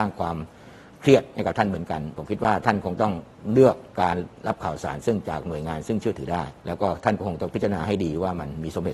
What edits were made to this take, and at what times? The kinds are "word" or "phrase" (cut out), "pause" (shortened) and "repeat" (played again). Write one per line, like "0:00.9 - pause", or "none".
0:03.9 - pause
0:06.6 - pause